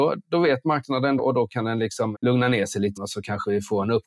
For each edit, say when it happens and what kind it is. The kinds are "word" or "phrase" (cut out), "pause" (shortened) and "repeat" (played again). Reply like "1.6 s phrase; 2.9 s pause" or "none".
1.2 s word; 2.1 s word; 3.0 s word

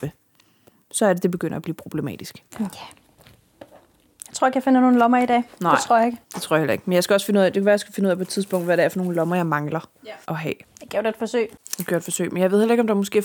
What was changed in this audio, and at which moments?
2.5 s pause; 6.2 s pause; 10.2 s pause; 10.6 s pause

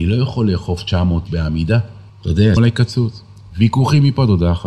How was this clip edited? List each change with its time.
1.3 s word; 2.1 s pause; 2.6 s word

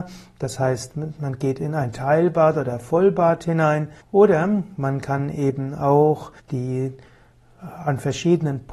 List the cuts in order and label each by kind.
4.0 s pause; 6.4 s pause

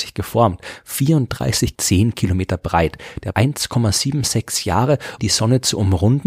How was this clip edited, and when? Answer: 1.7 s phrase; 3.3 s word; 5.2 s word

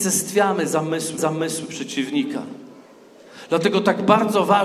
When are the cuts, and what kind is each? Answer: 1.2 s repeat

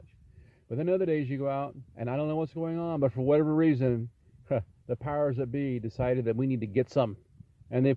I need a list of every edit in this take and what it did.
1.9 s pause

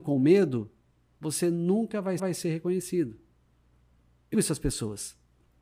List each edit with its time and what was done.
2.2 s repeat; 4.3 s word

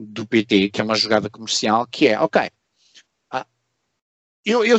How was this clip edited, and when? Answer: none

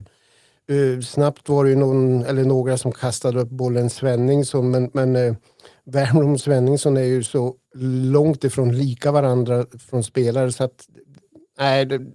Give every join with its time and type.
7.7 s pause

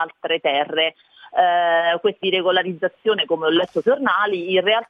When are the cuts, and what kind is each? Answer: 2.2 s phrase; 3.8 s phrase

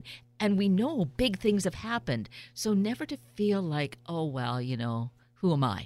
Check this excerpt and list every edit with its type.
none

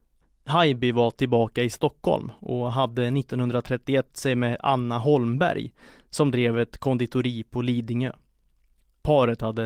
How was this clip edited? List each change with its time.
4.1 s word

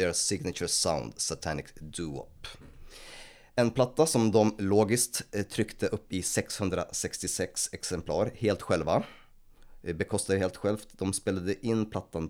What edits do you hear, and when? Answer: none

